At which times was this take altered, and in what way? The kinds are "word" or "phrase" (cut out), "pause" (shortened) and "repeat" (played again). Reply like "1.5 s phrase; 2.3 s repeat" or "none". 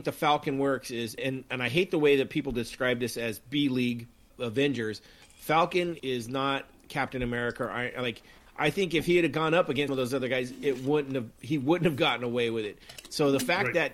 1.2 s word; 4.3 s word; 6.0 s word; 9.9 s word